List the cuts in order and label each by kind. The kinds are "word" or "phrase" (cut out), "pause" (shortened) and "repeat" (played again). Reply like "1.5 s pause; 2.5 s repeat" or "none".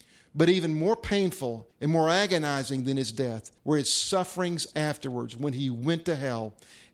1.7 s pause; 3.6 s pause

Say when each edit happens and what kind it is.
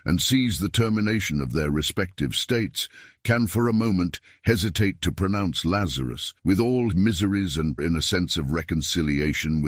6.4 s pause; 6.9 s word; 7.8 s phrase

